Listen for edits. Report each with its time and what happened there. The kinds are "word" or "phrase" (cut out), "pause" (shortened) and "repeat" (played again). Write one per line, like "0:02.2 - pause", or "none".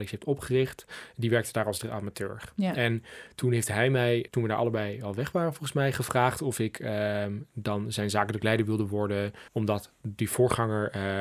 0:04.3 - word
0:09.5 - pause